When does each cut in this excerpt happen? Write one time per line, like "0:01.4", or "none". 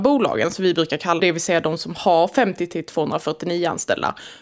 0:01.2

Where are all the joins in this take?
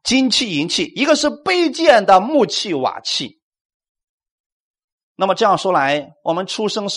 none

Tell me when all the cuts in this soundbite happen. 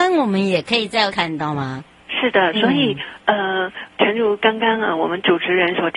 0:01.1
0:02.5

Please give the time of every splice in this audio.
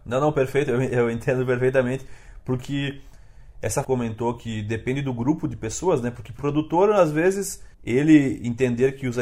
0:03.8
0:06.4
0:07.7

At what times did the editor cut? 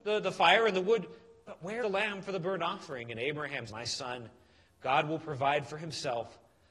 0:01.8
0:03.7

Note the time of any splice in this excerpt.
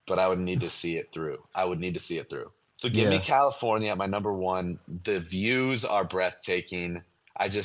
0:02.7

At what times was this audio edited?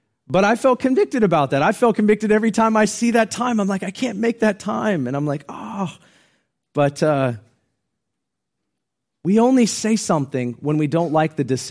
none

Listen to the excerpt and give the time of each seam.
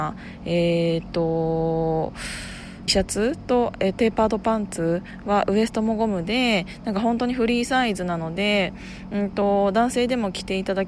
0:02.9
0:03.9

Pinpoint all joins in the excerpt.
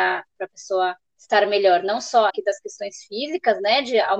0:01.1
0:02.3

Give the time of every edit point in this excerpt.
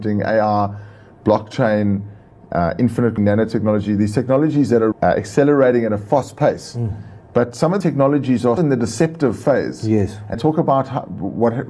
0:03.2
0:04.9
0:07.8
0:08.6
0:10.3

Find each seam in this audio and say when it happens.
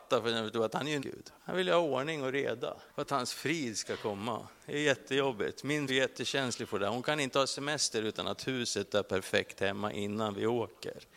0:01.0
0:01.3
0:02.9
0:05.9

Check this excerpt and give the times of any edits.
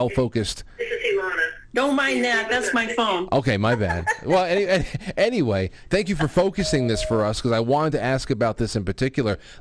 none

